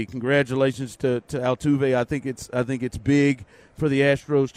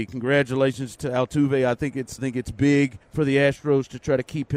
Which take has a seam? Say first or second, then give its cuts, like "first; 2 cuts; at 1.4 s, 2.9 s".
second; 3 cuts; at 1.0 s, 2.2 s, 3.0 s